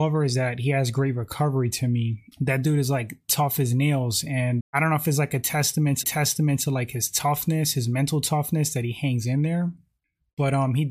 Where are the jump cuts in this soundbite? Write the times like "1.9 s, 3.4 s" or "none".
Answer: 2.3 s, 4.6 s, 6.0 s